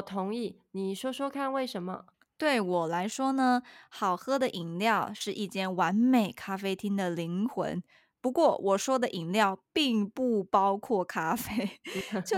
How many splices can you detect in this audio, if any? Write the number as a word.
one